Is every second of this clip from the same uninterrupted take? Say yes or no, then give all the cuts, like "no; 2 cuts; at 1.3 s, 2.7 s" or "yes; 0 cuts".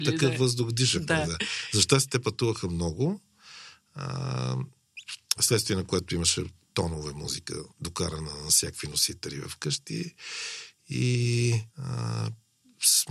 no; 2 cuts; at 7.7 s, 11.7 s